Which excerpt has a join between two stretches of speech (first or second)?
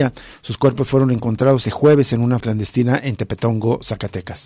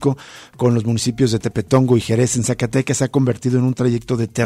first